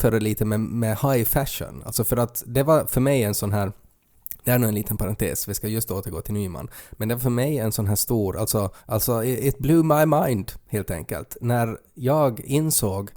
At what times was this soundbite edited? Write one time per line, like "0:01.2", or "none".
0:08.8